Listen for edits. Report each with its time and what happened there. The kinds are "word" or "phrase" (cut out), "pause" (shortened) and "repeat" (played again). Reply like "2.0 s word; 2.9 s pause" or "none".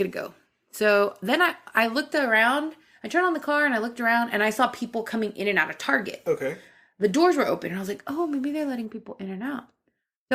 none